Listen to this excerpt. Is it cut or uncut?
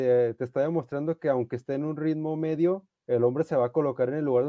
cut